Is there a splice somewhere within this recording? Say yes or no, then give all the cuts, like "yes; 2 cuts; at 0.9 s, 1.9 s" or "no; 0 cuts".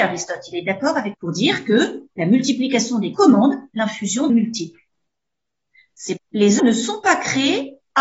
yes; 5 cuts; at 1.1 s, 3.1 s, 4.3 s, 6.2 s, 6.6 s